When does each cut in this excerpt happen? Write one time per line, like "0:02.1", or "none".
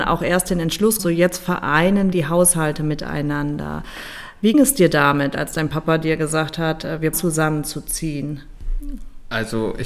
0:01.0
0:02.1
0:04.5
0:07.1